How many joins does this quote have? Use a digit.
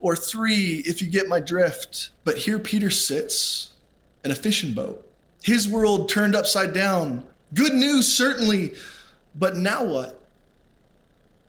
3